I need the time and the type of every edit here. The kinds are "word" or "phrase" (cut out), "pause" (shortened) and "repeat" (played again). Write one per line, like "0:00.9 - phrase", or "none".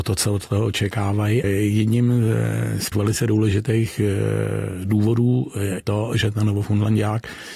0:01.4 - word
0:02.9 - word
0:05.8 - word